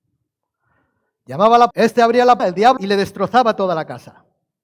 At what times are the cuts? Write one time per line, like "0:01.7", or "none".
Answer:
0:01.7
0:02.4
0:02.8

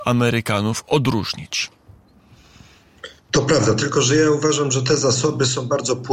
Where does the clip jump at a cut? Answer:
0:03.2

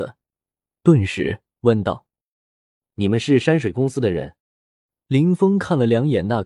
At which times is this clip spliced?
0:01.5
0:04.4

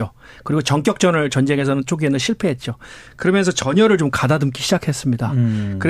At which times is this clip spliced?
0:01.9

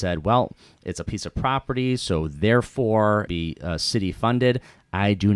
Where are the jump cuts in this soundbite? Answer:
0:01.0
0:03.3

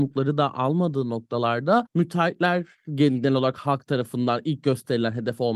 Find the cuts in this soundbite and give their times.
none

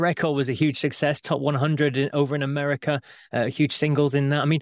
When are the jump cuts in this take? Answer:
none

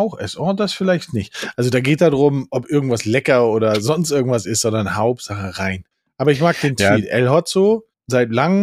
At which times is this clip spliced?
0:02.0

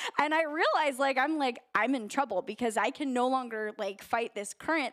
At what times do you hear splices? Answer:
none

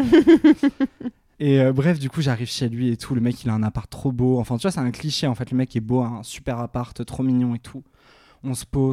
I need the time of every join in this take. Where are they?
0:01.3

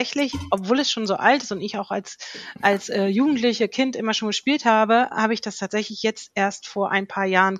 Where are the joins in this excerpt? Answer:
none

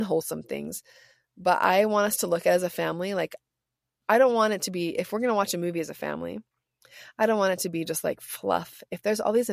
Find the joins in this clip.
none

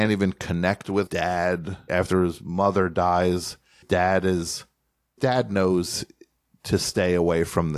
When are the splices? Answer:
0:01.1
0:01.9
0:03.8
0:05.2

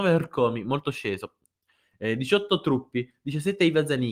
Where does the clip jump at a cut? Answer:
none

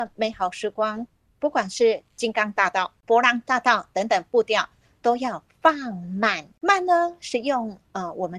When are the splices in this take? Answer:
none

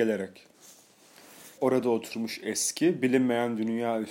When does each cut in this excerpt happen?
0:01.6

